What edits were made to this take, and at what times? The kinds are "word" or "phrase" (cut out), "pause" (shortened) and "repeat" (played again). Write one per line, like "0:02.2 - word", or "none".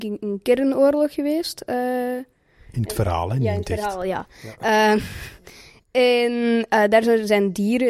none